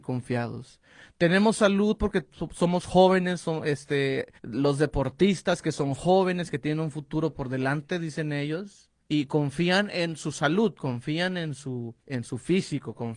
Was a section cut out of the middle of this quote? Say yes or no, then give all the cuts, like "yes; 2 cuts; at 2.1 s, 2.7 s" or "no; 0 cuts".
yes; 3 cuts; at 4.4 s, 9.0 s, 12.0 s